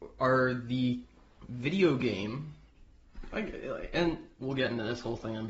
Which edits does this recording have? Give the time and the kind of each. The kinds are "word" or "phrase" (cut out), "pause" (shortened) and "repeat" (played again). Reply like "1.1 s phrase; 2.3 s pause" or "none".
none